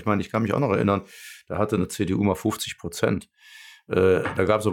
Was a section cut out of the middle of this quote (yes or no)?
no